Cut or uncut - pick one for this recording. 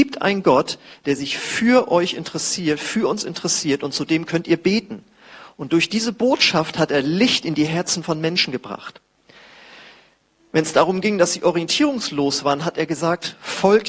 uncut